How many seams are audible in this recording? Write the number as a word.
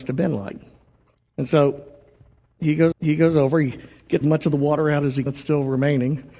four